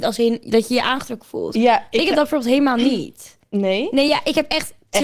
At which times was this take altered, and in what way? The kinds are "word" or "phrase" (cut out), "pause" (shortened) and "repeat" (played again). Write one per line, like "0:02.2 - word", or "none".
none